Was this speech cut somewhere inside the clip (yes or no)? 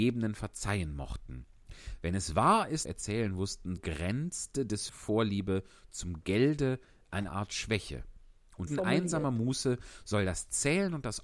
yes